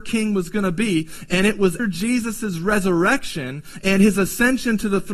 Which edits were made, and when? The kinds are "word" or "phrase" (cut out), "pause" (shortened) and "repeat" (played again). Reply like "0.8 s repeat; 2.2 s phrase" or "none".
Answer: 1.8 s word